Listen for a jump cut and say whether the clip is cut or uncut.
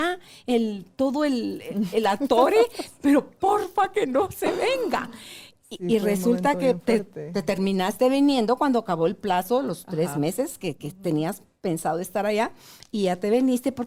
uncut